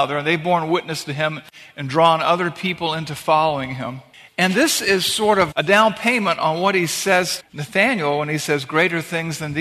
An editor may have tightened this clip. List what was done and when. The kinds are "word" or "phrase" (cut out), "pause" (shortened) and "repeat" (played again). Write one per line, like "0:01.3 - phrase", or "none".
0:05.5 - word
0:07.4 - word